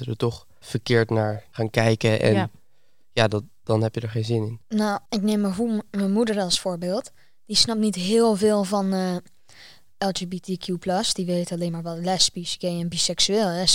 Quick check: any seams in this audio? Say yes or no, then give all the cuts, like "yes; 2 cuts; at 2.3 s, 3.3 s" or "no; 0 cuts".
yes; 1 cut; at 5.1 s